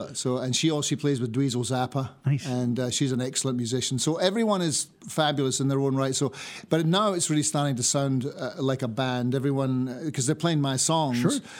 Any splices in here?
no; 0 cuts

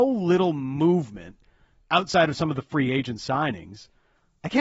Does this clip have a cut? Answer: no; 0 cuts

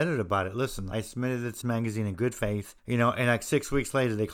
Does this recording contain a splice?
yes; 3 cuts; at 0.9 s, 1.6 s, 2.8 s

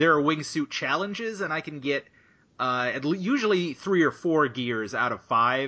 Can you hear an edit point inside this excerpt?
no; 0 cuts

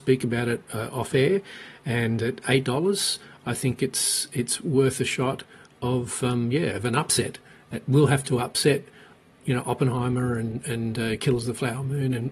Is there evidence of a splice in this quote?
no; 0 cuts

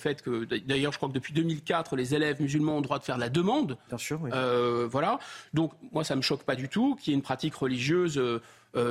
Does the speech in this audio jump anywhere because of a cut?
no; 0 cuts

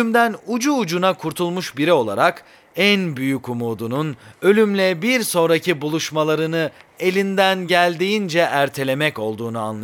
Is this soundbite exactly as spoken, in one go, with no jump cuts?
yes; 0 cuts

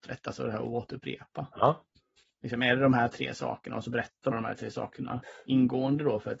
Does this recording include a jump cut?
yes; 1 cut; at 4.3 s

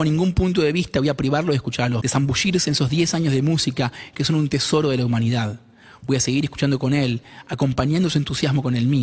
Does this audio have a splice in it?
yes; 1 cut; at 2.0 s

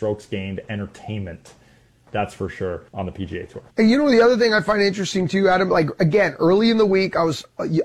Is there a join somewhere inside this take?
yes; 2 cuts; at 2.9 s, 3.7 s

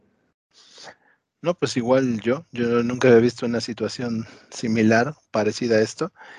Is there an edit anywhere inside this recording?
no; 0 cuts

